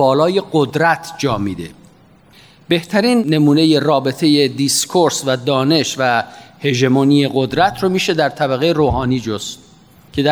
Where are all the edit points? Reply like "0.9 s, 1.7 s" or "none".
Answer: none